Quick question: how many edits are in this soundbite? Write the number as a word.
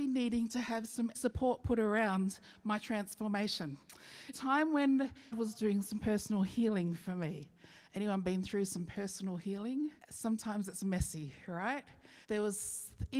five